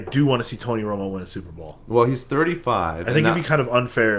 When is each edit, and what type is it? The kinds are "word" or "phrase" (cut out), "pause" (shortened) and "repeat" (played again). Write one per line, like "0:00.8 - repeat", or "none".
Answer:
none